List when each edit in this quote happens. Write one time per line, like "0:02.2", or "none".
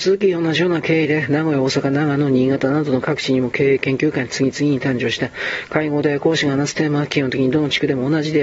none